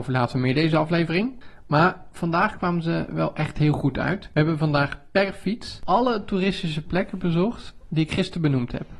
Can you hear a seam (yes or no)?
no